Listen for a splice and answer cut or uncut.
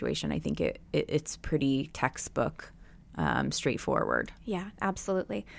uncut